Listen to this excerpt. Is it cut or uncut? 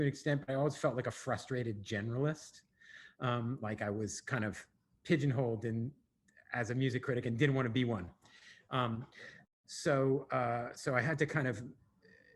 uncut